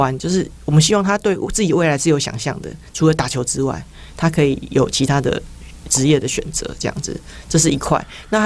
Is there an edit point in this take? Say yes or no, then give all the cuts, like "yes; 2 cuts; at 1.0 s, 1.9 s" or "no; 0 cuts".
no; 0 cuts